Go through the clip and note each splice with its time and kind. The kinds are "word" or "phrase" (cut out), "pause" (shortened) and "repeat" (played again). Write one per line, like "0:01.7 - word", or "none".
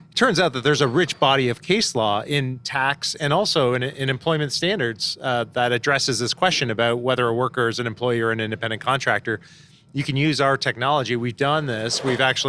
none